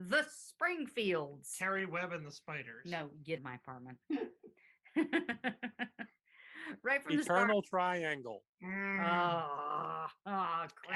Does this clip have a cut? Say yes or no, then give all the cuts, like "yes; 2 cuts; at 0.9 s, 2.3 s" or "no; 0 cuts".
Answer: yes; 1 cut; at 3.4 s